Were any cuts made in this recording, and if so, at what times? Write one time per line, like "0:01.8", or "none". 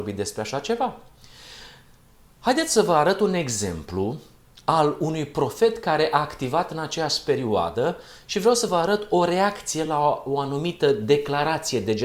none